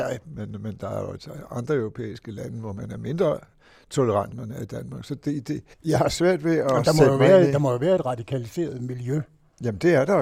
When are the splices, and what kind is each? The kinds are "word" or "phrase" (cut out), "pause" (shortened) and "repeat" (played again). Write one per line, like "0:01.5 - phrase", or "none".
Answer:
0:04.3 - phrase
0:05.7 - pause